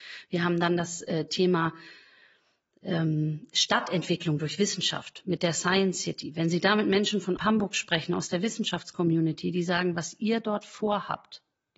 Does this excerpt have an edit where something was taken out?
yes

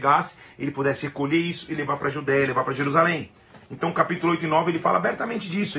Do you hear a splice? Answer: no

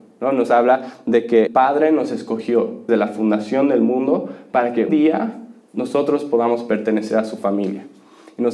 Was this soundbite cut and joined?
yes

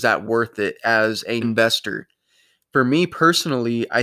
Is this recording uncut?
no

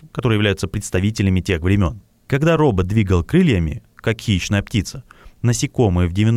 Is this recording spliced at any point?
no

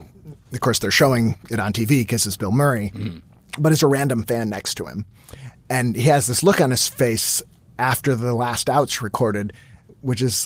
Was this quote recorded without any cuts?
no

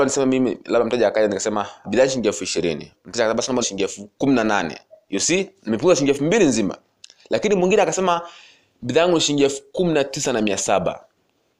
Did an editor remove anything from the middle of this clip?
yes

